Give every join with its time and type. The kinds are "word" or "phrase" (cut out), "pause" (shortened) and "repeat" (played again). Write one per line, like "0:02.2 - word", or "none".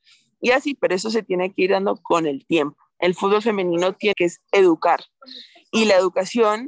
0:04.1 - phrase